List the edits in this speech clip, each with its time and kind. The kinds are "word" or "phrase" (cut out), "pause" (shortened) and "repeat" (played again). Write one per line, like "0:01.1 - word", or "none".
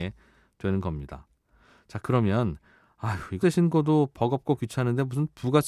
0:03.4 - word